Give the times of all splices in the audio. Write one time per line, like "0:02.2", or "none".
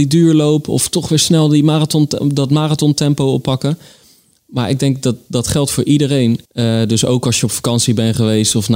0:06.4

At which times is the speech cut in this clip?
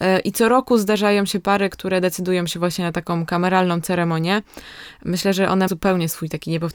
0:05.7

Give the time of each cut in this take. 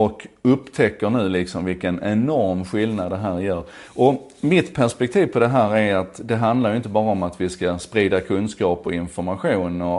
none

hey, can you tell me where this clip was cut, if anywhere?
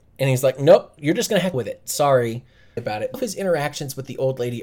0:01.0
0:01.5
0:02.8
0:03.1

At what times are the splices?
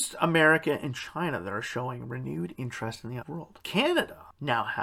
0:03.2

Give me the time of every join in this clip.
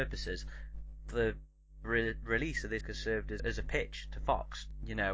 0:01.8
0:02.8
0:03.4

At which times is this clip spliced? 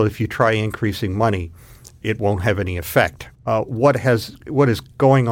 0:02.0
0:03.3

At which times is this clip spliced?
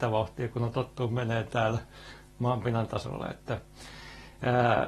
none

